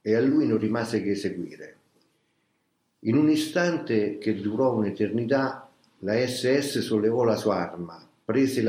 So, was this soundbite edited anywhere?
no; 0 cuts

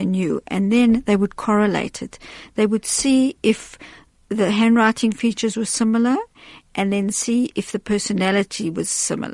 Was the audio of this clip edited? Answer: no; 0 cuts

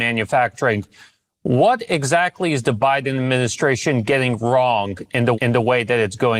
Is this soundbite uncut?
no; 1 cut; at 5.3 s

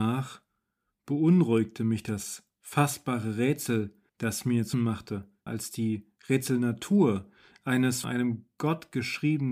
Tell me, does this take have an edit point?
yes; 4 cuts; at 4.1 s, 4.7 s, 5.5 s, 8.0 s

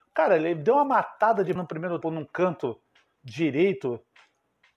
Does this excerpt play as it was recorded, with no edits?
no; 2 cuts; at 1.6 s, 2.0 s

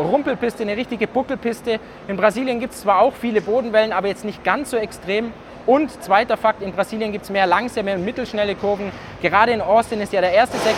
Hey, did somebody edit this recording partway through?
no; 0 cuts

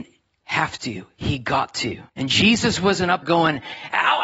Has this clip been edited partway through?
yes; 2 cuts; at 2.1 s, 3.2 s

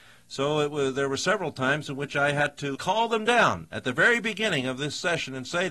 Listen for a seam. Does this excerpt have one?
yes; 1 cut; at 2.8 s

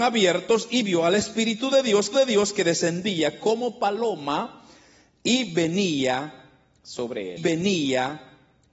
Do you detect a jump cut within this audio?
yes; 2 cuts; at 2.1 s, 7.4 s

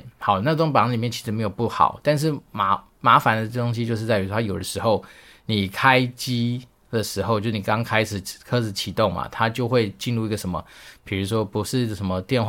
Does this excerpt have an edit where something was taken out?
no; 0 cuts

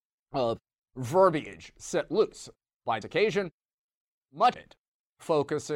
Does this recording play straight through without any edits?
no; 2 cuts; at 3.0 s, 4.5 s

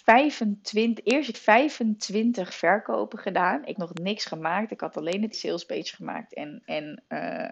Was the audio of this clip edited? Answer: yes; 3 cuts; at 1.3 s, 3.8 s, 5.3 s

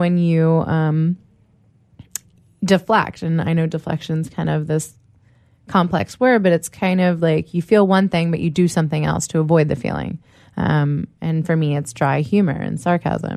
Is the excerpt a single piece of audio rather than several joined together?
yes; 0 cuts

